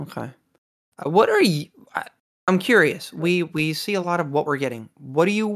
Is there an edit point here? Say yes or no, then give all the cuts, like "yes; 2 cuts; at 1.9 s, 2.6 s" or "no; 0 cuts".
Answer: no; 0 cuts